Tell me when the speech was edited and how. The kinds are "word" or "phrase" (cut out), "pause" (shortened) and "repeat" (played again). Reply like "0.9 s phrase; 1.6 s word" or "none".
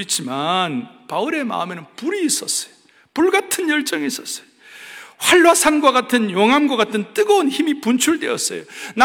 none